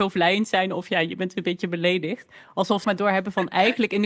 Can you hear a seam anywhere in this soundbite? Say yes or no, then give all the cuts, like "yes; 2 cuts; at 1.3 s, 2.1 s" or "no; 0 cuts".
yes; 1 cut; at 2.8 s